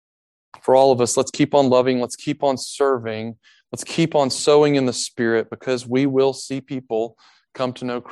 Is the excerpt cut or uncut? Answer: uncut